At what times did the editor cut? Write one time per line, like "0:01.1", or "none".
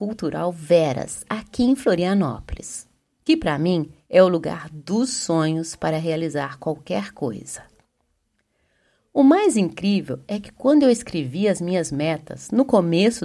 none